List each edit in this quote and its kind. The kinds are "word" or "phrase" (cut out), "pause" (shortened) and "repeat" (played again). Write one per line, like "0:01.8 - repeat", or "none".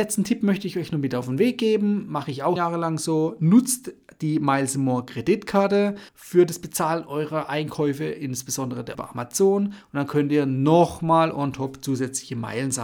0:02.6 - word
0:06.1 - pause
0:08.9 - word